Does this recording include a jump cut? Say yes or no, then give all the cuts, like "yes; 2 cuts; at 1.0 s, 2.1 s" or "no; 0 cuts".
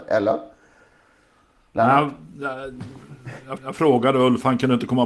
yes; 1 cut; at 3.6 s